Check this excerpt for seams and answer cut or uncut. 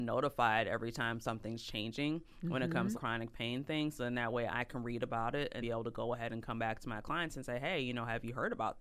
cut